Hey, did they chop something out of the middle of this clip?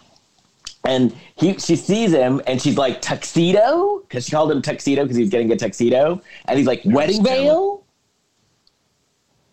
no; 0 cuts

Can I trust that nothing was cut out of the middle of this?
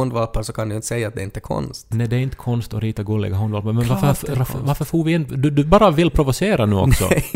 yes; 0 cuts

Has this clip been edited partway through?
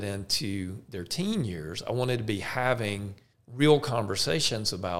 yes; 1 cut; at 3.3 s

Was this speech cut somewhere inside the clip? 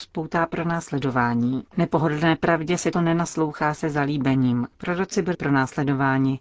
yes; 4 cuts; at 1.7 s, 2.9 s, 4.7 s, 5.3 s

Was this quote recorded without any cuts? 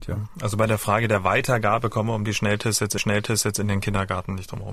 no; 1 cut; at 3.0 s

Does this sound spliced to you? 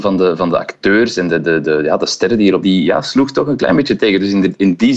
yes; 1 cut; at 2.6 s

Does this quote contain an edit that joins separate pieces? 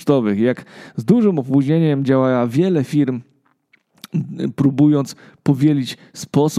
no; 0 cuts

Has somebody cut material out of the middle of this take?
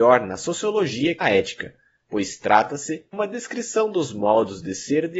yes; 2 cuts; at 1.2 s, 3.1 s

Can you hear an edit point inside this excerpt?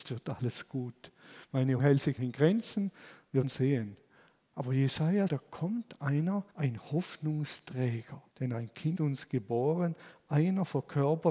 yes; 7 cuts; at 1.8 s, 2.2 s, 3.4 s, 5.3 s, 6.5 s, 8.3 s, 8.9 s

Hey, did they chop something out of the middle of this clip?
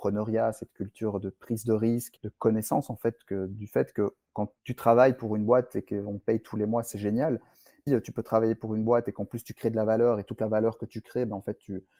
yes; 3 cuts; at 2.2 s, 4.6 s, 7.9 s

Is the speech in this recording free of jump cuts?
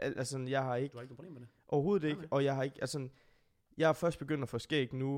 yes; 0 cuts

